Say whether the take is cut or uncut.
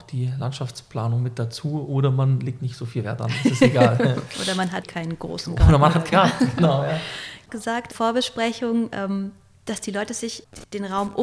cut